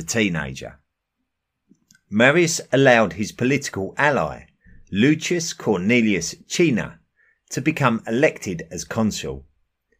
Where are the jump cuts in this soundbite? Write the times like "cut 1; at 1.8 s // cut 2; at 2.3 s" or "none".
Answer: none